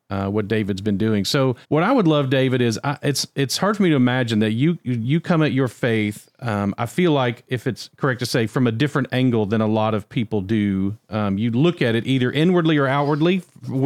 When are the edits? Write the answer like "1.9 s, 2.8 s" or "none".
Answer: 1.6 s